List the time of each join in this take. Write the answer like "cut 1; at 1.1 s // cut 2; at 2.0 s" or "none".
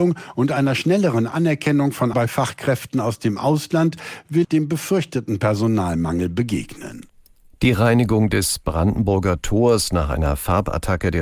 cut 1; at 2.1 s // cut 2; at 4.4 s